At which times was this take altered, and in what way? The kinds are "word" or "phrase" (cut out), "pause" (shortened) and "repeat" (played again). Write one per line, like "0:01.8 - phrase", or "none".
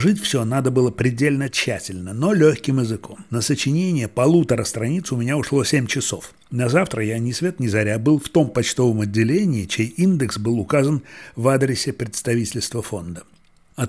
0:03.3 - pause
0:06.4 - pause